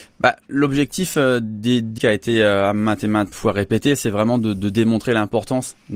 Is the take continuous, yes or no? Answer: no